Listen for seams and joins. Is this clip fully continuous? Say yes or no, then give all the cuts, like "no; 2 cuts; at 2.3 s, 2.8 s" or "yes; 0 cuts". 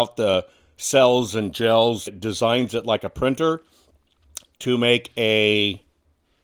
no; 1 cut; at 2.1 s